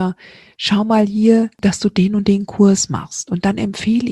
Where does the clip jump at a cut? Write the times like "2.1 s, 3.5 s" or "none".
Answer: 1.5 s